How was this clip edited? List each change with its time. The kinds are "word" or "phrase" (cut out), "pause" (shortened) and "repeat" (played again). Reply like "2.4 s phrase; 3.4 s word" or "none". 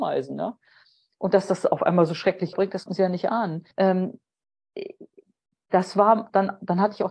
2.5 s word; 2.9 s word; 3.7 s pause

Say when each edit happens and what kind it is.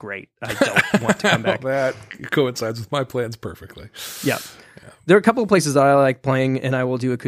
none

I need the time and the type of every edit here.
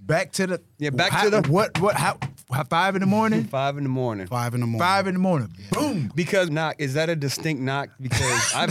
1.4 s word; 6.5 s phrase

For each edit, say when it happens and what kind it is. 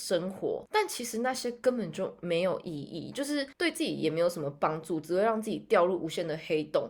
3.5 s pause

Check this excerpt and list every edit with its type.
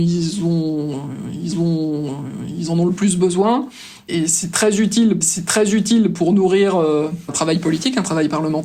1.5 s repeat; 5.2 s repeat; 7.3 s word

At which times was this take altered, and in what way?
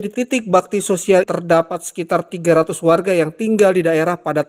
1.2 s word

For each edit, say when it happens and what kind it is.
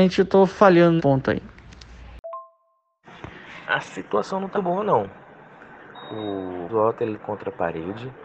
1.0 s word; 4.5 s word; 6.7 s word; 7.2 s word

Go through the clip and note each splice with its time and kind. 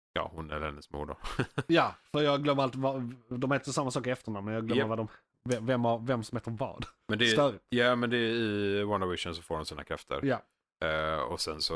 none

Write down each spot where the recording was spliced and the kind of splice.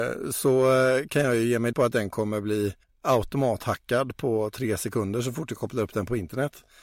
1.7 s word; 2.8 s pause

